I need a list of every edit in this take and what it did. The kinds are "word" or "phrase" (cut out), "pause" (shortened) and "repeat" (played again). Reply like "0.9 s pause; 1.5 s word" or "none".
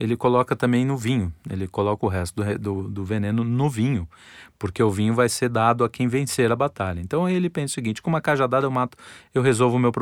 none